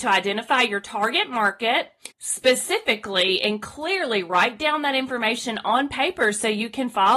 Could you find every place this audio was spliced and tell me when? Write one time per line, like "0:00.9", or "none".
0:02.1